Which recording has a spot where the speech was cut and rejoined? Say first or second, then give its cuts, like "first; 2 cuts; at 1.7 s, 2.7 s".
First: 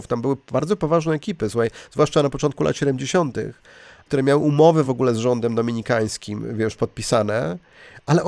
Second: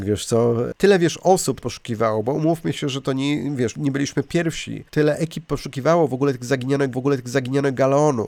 second; 4 cuts; at 1.6 s, 3.7 s, 4.9 s, 6.9 s